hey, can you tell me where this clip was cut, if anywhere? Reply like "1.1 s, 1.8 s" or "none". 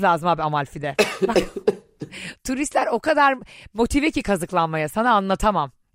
none